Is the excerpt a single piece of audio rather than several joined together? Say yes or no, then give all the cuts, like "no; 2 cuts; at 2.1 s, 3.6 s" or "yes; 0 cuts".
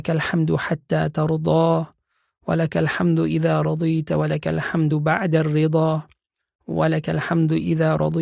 yes; 0 cuts